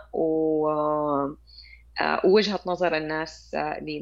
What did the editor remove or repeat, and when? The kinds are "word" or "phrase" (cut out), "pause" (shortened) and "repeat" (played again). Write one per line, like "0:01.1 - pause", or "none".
none